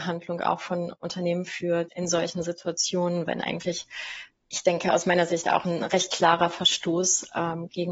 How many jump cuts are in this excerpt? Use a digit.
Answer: 2